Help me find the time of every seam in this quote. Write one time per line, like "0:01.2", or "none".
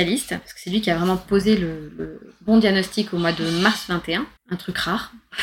0:04.4